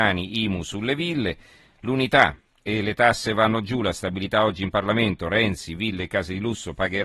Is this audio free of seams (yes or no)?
yes